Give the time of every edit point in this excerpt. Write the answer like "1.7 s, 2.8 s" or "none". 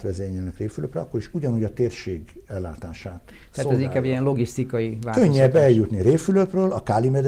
none